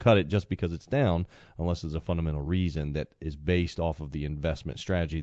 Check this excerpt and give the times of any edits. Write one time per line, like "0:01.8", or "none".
none